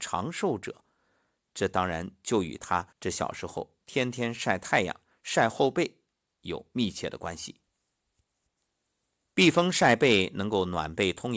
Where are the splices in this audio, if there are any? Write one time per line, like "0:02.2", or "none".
0:02.9
0:03.8